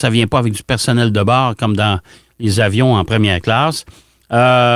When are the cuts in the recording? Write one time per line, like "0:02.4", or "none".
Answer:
none